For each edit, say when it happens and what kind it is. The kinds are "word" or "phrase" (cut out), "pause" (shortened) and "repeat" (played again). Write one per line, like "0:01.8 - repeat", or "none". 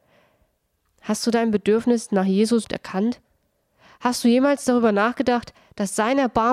0:02.6 - word